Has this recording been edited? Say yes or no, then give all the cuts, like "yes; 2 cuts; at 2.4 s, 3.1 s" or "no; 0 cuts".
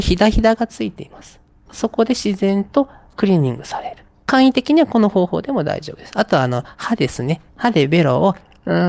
yes; 1 cut; at 7.5 s